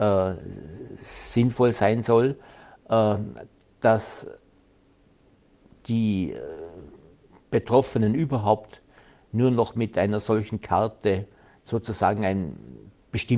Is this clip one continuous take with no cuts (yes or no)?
yes